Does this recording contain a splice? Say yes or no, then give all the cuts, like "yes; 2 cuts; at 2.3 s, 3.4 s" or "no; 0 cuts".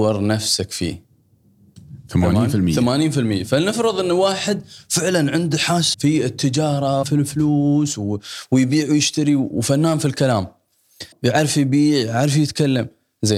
yes; 3 cuts; at 5.9 s, 7.0 s, 11.1 s